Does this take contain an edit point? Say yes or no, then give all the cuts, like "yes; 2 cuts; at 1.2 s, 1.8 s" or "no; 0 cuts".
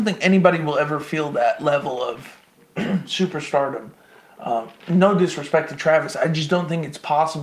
no; 0 cuts